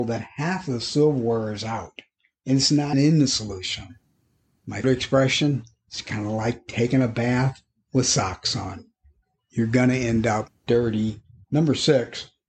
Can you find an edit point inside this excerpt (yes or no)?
yes